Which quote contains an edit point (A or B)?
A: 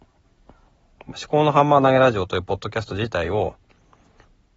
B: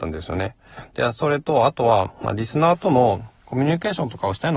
B